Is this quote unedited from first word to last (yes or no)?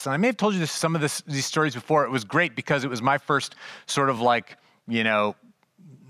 yes